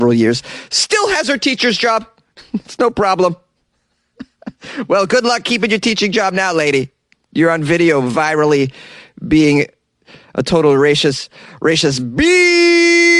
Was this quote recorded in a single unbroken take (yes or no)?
yes